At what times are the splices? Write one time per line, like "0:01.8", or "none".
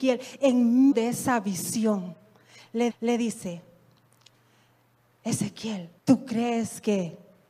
0:00.9
0:02.9
0:06.0